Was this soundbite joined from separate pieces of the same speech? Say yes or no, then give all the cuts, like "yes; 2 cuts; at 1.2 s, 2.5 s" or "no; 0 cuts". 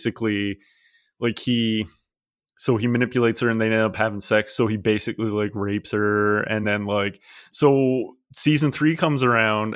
no; 0 cuts